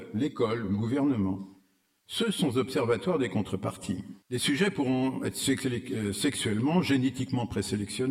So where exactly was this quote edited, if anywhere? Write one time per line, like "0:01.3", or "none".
0:04.2